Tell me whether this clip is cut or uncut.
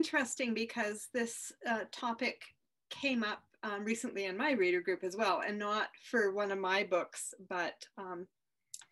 uncut